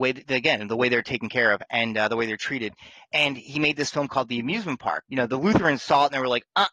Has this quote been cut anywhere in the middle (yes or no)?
yes